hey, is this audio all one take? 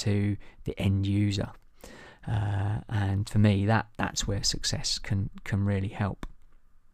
yes; 0 cuts

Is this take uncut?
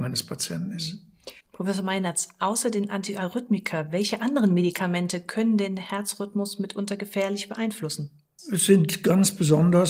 no; 1 cut; at 1.4 s

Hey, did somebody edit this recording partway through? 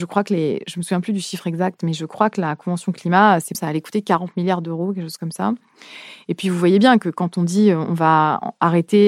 yes; 1 cut; at 3.5 s

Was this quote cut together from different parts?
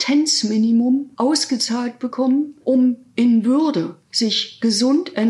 yes; 3 cuts; at 1.1 s, 2.6 s, 4.0 s

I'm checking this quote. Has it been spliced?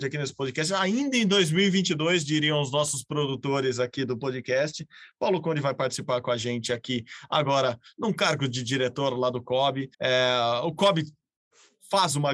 yes; 1 cut; at 9.9 s

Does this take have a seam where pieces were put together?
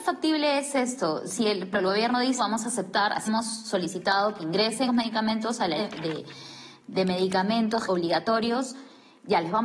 yes; 6 cuts; at 1.7 s, 2.4 s, 3.3 s, 4.9 s, 5.8 s, 7.9 s

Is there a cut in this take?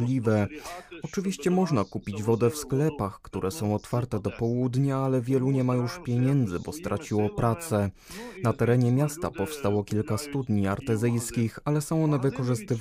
no; 0 cuts

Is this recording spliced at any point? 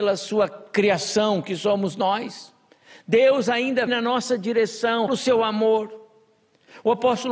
yes; 2 cuts; at 3.9 s, 5.1 s

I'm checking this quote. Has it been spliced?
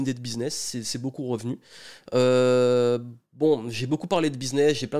no; 0 cuts

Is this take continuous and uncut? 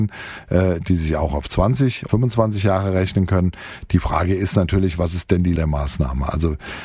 no; 2 cuts; at 2.1 s, 5.6 s

